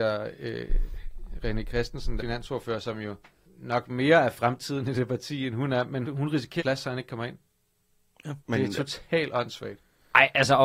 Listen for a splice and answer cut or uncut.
cut